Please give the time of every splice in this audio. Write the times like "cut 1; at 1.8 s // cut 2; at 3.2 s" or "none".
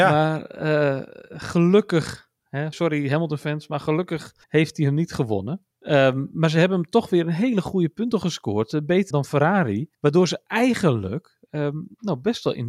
cut 1; at 2.7 s // cut 2; at 4.4 s // cut 3; at 5.7 s // cut 4; at 9.1 s // cut 5; at 9.9 s